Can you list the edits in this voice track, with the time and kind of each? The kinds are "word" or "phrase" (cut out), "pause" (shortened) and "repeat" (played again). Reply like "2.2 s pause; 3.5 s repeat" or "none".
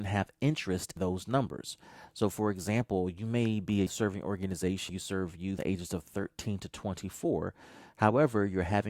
1.0 s word; 3.9 s word; 4.9 s word; 5.6 s word